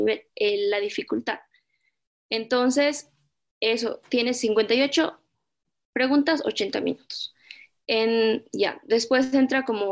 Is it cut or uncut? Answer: uncut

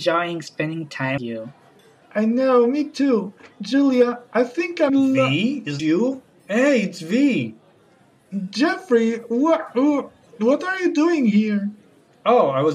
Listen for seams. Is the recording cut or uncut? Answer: cut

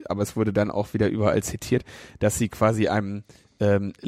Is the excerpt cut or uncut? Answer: uncut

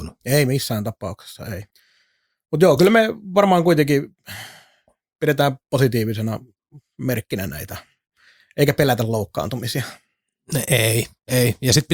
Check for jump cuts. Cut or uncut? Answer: uncut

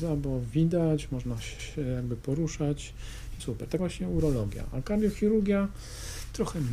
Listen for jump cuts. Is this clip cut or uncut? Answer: cut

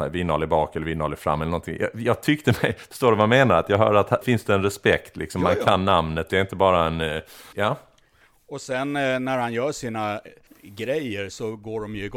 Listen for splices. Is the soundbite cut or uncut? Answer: cut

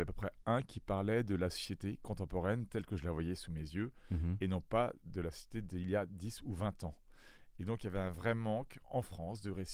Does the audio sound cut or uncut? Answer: uncut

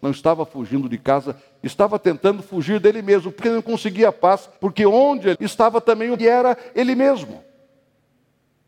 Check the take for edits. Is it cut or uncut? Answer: cut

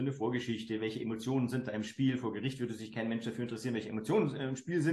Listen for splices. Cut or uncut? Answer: uncut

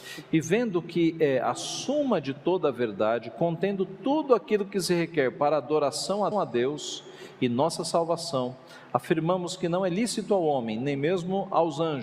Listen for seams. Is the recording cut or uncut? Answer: cut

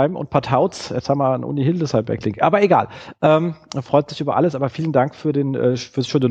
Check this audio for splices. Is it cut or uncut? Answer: uncut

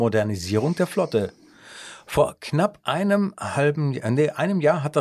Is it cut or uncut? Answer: uncut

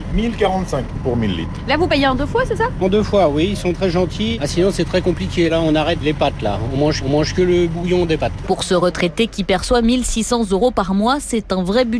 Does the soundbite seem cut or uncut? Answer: cut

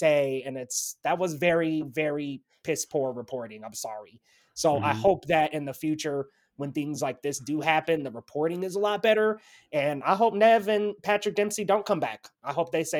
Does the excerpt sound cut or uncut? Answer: uncut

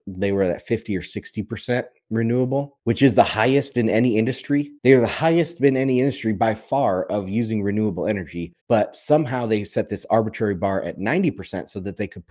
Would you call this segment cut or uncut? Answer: cut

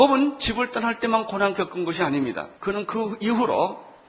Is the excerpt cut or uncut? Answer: cut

